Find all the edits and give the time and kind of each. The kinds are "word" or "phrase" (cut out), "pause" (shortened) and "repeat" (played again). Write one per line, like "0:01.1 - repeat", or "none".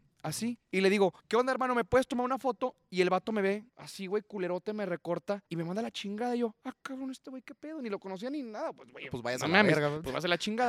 0:01.2 - pause
0:03.7 - pause
0:05.5 - pause